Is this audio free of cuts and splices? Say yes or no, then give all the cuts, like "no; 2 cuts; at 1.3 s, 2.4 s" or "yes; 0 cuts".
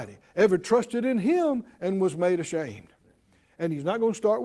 yes; 0 cuts